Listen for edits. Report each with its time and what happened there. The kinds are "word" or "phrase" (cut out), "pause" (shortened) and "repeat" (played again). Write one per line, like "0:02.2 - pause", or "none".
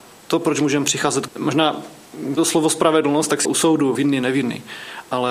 0:01.3 - phrase
0:02.4 - phrase
0:03.4 - phrase
0:03.9 - word